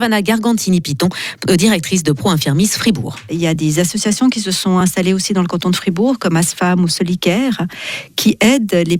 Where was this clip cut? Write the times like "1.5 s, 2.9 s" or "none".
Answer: none